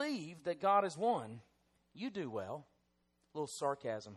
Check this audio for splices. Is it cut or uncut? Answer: uncut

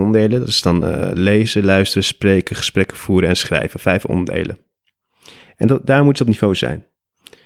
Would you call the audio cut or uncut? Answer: uncut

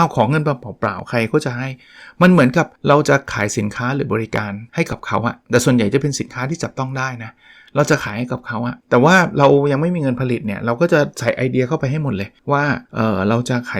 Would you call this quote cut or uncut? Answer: cut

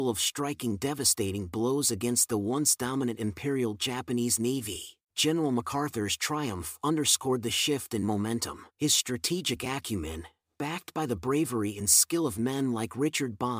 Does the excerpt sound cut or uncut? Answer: cut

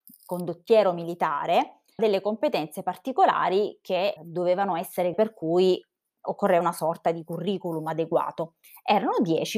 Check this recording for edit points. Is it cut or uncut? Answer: cut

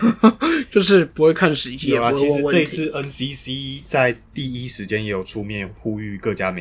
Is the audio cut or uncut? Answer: uncut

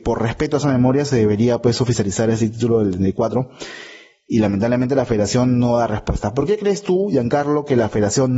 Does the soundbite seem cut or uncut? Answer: uncut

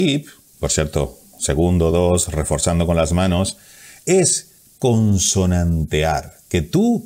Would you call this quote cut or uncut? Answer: uncut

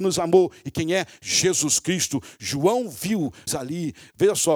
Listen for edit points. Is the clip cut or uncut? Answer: cut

